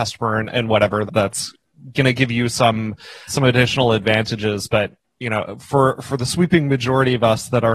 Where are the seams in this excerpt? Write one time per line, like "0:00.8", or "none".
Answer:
0:01.1
0:03.3